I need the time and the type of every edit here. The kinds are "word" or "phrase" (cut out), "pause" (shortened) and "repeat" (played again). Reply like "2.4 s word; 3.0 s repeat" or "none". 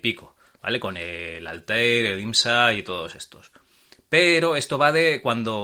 none